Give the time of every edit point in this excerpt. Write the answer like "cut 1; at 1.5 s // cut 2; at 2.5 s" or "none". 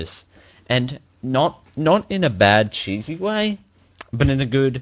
none